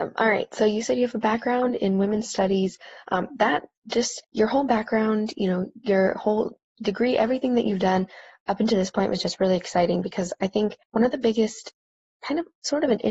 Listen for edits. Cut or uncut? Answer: cut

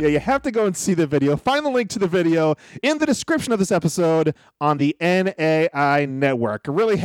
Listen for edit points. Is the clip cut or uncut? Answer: uncut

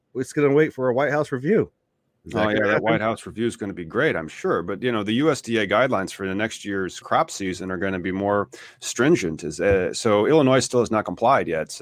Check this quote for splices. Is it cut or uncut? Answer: cut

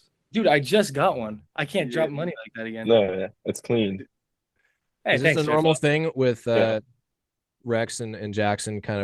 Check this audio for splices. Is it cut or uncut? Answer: cut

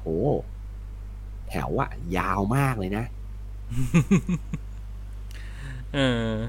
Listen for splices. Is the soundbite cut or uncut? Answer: uncut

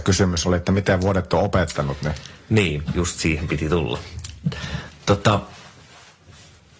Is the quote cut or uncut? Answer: uncut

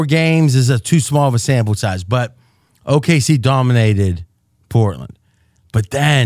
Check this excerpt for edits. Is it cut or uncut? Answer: uncut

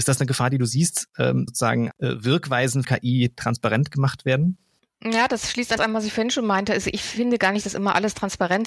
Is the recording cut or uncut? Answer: cut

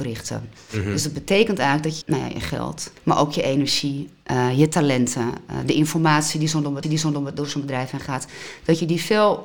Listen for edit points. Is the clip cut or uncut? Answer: cut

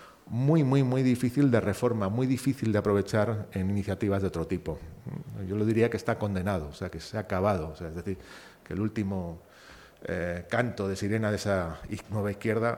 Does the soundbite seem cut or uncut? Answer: uncut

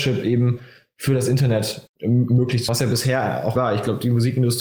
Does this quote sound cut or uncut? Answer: cut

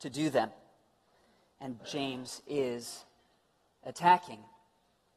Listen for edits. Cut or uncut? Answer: cut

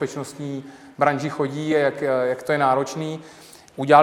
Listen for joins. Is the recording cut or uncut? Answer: uncut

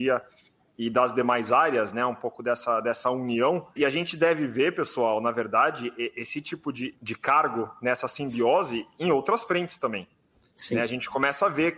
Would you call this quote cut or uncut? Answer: uncut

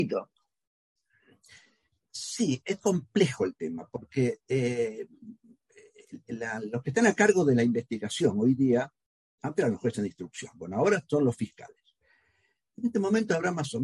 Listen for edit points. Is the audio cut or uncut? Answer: uncut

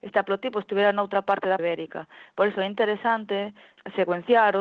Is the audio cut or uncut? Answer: cut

